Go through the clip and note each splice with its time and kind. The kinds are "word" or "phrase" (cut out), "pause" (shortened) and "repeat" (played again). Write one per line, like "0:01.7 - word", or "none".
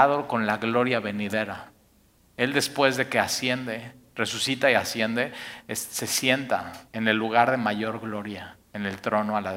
0:02.2 - pause
0:06.9 - pause
0:08.6 - pause